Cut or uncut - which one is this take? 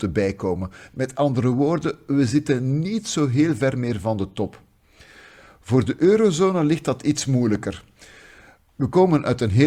uncut